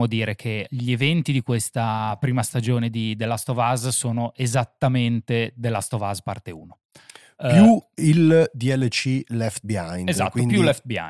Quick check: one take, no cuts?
yes; 0 cuts

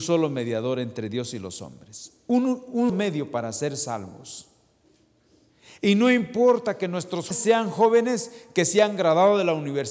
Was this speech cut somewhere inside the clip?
yes; 2 cuts; at 2.9 s, 7.3 s

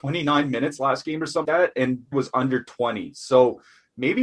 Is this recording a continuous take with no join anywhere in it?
no; 2 cuts; at 1.4 s, 2.1 s

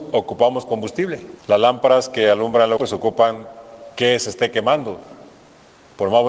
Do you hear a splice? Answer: yes; 2 cuts; at 1.4 s, 2.8 s

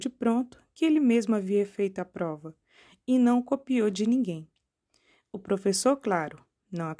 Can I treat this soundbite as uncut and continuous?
yes; 0 cuts

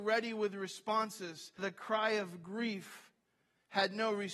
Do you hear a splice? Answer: yes; 1 cut; at 1.6 s

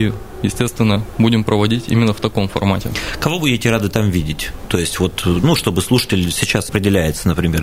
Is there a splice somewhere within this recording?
yes; 1 cut; at 6.7 s

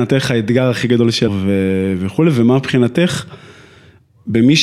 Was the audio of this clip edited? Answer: yes; 1 cut; at 1.3 s

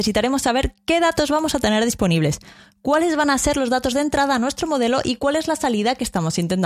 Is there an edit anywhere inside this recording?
no; 0 cuts

